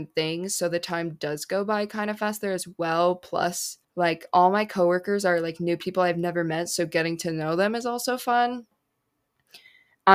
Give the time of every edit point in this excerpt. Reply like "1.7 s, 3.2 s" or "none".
3.8 s